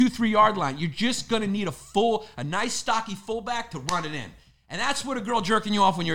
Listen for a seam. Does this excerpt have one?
no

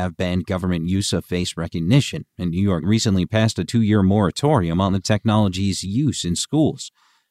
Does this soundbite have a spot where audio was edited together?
yes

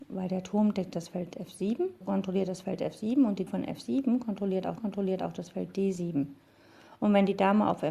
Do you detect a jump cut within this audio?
yes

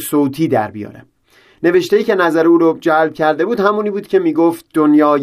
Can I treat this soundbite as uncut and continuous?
yes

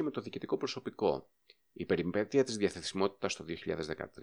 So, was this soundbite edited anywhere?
no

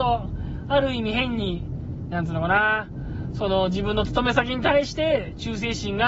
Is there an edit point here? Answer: yes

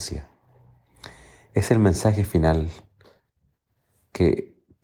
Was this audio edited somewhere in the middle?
no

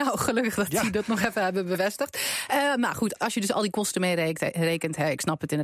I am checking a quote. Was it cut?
no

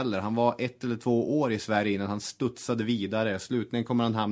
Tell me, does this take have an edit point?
no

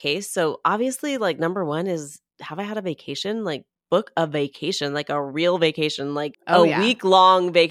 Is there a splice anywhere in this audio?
yes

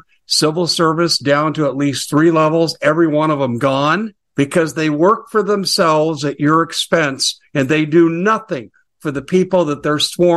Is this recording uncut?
no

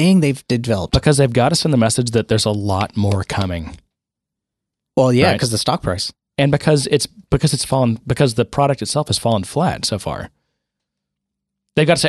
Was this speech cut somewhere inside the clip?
no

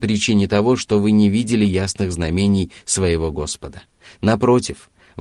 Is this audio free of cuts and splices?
yes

